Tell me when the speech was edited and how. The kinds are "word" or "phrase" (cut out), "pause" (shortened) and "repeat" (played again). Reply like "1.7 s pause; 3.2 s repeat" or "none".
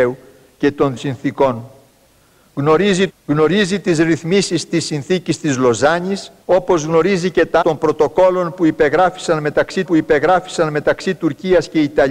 1.0 s word; 3.1 s phrase; 6.4 s pause; 7.6 s word; 9.9 s repeat